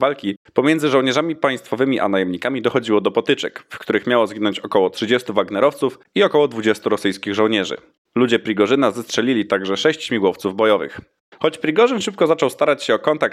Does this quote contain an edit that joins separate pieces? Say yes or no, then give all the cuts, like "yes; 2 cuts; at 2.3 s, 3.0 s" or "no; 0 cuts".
no; 0 cuts